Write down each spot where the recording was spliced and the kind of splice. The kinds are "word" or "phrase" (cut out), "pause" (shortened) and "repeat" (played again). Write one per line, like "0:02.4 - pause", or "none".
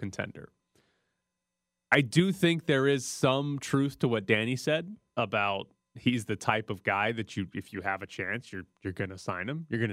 none